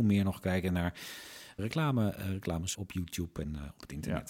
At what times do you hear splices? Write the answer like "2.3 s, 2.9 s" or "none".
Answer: 1.6 s, 2.7 s